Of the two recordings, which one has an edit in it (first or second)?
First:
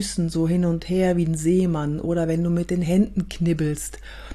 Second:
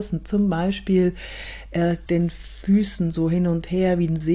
second